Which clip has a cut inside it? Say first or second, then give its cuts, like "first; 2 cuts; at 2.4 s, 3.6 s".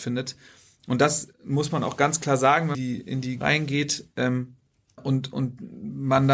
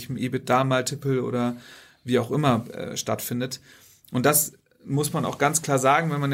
first; 4 cuts; at 1.3 s, 2.7 s, 3.4 s, 5.0 s